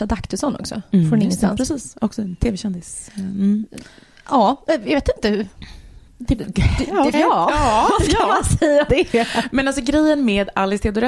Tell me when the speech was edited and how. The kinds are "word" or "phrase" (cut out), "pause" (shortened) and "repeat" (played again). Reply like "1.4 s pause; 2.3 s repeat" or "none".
7.1 s word; 8.9 s word